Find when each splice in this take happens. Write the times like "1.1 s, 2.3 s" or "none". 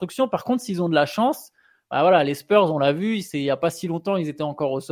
none

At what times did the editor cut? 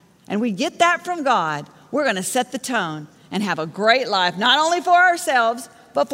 none

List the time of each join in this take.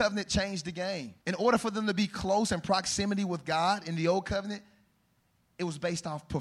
1.2 s

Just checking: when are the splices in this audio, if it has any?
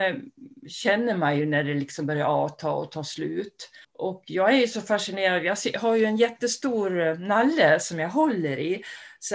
3.8 s

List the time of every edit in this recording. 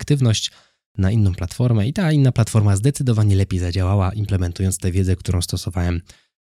none

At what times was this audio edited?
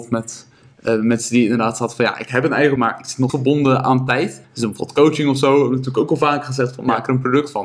2.8 s, 3.3 s, 4.4 s

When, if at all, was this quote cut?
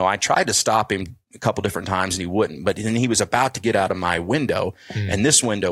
none

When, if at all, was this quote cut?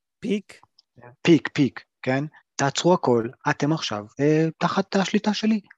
1.2 s, 2.4 s, 4.1 s

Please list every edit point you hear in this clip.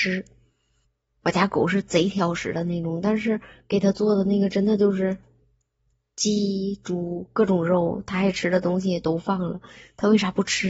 none

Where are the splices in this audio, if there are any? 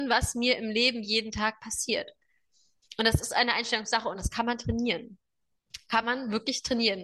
none

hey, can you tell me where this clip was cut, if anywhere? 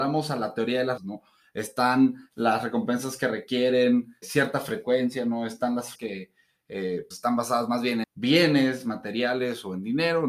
1.0 s, 4.2 s, 5.9 s, 7.1 s, 8.0 s

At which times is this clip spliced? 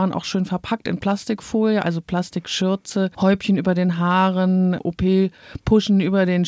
none

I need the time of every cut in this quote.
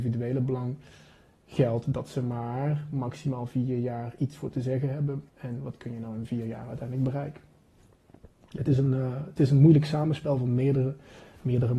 5.3 s

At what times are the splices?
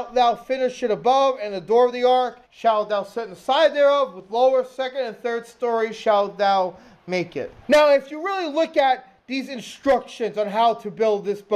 2.4 s, 7.6 s

